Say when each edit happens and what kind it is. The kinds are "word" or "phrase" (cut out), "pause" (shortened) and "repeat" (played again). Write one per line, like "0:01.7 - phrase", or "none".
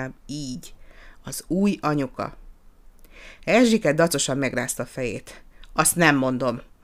none